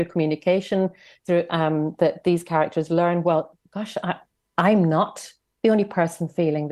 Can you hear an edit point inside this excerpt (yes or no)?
no